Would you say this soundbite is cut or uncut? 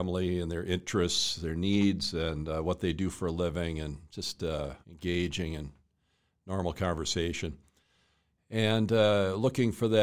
cut